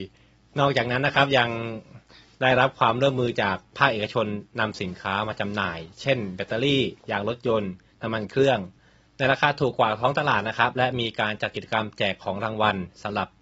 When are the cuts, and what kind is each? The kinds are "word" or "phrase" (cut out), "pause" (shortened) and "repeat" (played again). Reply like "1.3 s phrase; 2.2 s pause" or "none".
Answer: none